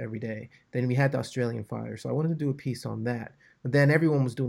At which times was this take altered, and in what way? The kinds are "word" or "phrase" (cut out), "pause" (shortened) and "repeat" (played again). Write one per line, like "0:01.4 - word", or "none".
none